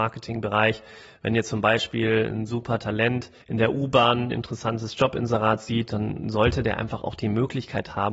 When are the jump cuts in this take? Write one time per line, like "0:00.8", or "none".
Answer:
0:02.3
0:03.4